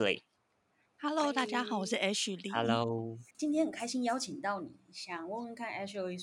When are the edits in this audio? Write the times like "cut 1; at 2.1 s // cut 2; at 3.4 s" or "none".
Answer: cut 1; at 3.3 s